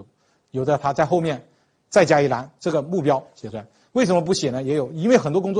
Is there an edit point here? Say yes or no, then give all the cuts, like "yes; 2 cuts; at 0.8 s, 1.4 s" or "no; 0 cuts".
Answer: no; 0 cuts